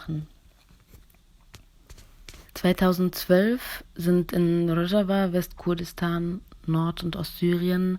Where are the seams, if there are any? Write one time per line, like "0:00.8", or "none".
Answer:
0:02.5